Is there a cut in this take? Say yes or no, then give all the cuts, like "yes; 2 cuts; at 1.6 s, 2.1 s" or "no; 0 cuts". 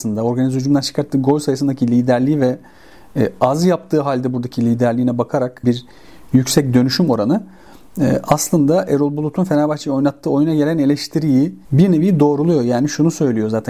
yes; 2 cuts; at 5.6 s, 11.6 s